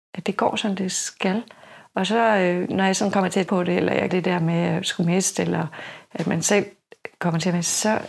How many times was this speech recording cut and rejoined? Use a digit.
2